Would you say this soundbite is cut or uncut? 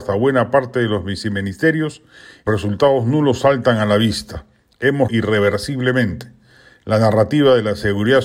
cut